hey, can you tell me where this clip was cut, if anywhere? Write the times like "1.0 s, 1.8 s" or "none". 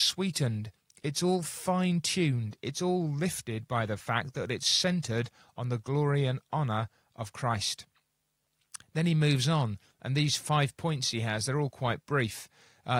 none